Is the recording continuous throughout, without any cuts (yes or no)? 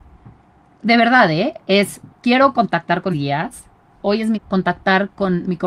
no